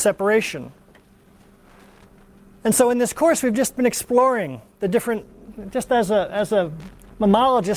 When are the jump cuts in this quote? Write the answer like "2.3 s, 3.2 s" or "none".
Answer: none

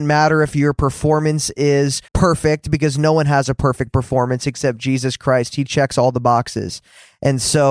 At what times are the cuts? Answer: 2.1 s

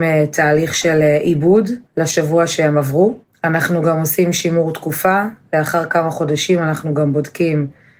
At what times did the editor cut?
1.9 s, 3.2 s

